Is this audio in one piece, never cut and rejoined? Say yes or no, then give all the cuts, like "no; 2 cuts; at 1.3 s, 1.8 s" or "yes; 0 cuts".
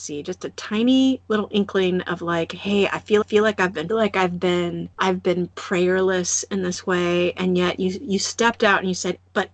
no; 3 cuts; at 3.2 s, 3.9 s, 4.9 s